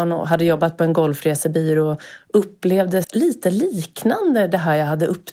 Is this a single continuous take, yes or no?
no